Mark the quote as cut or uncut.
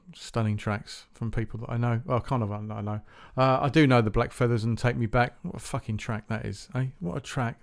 uncut